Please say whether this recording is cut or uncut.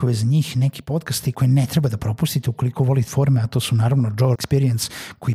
cut